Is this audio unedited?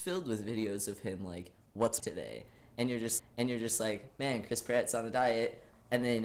no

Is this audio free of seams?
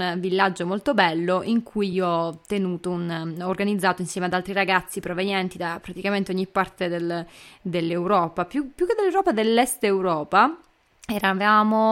yes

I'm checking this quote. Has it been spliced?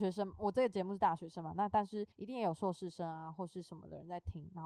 yes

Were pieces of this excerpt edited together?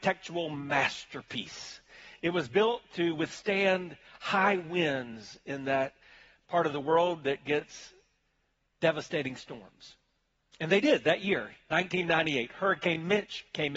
no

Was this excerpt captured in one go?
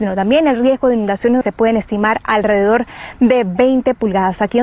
no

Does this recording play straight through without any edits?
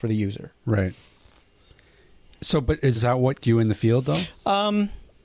no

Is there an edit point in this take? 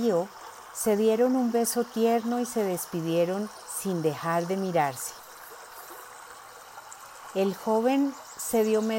no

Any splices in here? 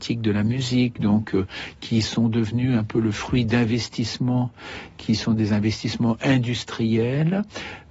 no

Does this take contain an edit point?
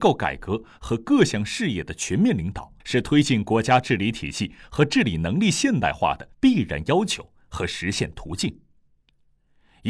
yes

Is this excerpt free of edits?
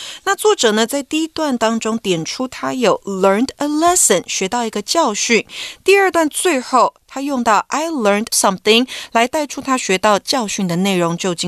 no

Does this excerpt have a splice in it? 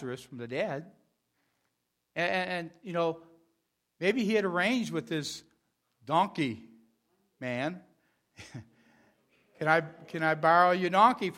no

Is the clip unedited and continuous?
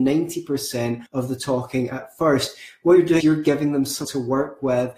no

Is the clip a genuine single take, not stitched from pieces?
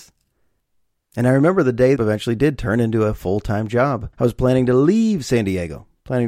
no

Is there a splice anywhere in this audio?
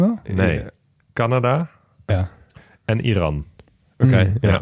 yes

